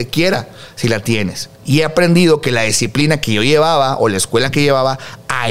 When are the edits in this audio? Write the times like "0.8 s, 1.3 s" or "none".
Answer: 1.6 s